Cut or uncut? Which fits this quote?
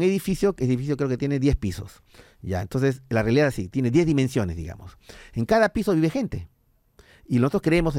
uncut